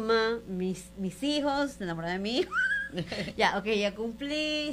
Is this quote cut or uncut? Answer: uncut